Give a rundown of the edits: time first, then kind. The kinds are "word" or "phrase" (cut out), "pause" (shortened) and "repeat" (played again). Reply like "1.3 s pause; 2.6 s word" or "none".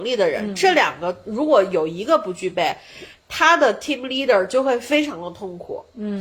none